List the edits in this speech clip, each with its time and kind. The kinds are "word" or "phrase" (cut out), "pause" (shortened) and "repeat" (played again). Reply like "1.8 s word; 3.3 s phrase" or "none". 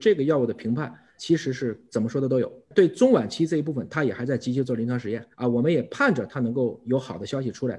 1.2 s word; 5.3 s pause

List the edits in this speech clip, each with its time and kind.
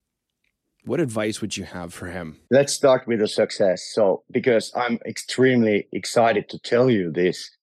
2.5 s pause

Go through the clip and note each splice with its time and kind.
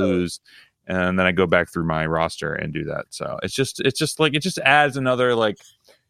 none

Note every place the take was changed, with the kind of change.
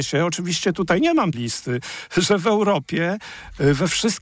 1.3 s word

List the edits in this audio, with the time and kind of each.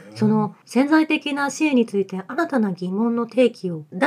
none

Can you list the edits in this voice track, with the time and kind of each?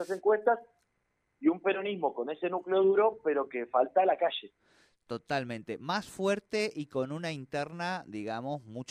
none

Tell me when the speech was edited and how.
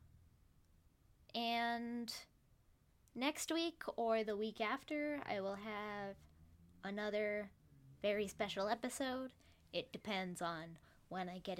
none

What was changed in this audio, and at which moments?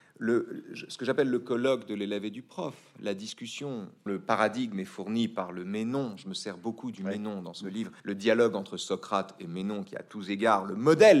4.1 s word; 8.0 s pause

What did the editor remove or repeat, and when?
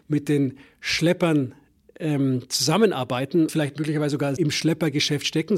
3.5 s word; 4.4 s word

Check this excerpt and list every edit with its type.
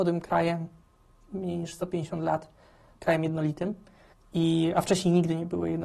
2.9 s word; 4.1 s pause

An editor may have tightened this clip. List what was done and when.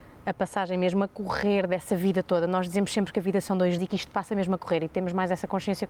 3.8 s word

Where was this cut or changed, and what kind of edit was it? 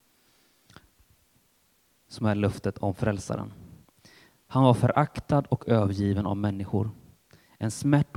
none

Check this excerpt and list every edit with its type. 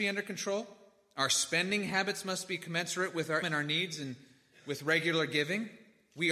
3.4 s word

